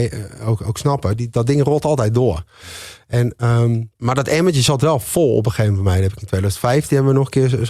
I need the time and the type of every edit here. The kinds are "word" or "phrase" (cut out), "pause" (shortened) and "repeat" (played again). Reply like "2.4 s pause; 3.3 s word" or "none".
3.9 s pause